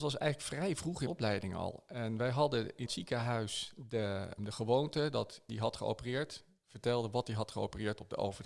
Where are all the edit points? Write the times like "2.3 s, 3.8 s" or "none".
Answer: 1.1 s, 2.9 s, 4.4 s, 5.5 s